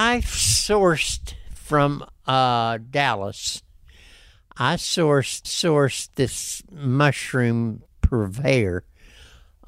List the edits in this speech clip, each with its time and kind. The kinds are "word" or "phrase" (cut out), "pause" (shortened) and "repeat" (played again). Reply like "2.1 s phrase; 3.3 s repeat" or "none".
5.4 s repeat; 7.9 s pause